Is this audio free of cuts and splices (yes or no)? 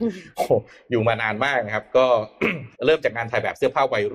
no